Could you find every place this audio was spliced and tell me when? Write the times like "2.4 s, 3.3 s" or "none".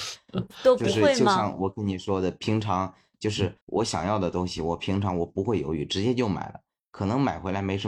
3.6 s